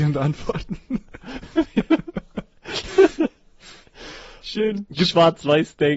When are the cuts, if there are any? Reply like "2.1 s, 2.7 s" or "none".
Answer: 4.4 s

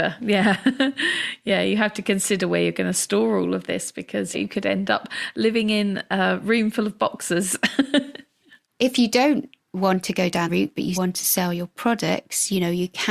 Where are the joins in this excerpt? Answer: 4.3 s, 10.5 s, 10.9 s

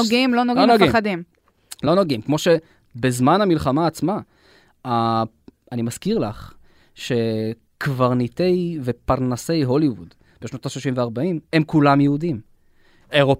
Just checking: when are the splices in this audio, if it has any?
none

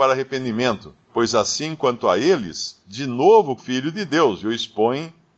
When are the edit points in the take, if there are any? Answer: 1.0 s, 2.8 s, 3.6 s

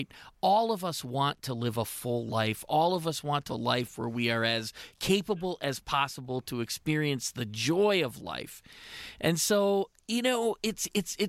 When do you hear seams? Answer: 3.5 s

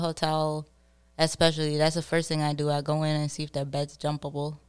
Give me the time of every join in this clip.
none

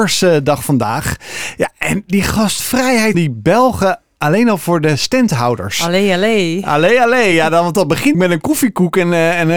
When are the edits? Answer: 3.1 s, 8.1 s

